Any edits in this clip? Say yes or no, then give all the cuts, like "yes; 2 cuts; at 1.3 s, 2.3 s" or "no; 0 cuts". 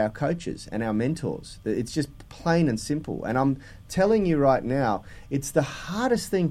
no; 0 cuts